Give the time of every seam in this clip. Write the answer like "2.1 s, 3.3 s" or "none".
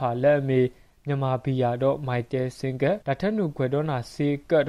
3.0 s